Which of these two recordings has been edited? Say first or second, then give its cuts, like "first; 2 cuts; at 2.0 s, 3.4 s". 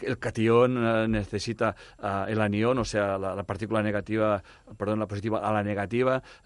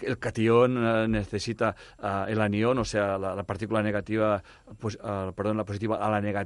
first; 1 cut; at 4.8 s